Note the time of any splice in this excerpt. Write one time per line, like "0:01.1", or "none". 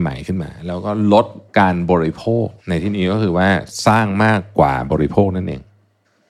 0:01.5
0:02.6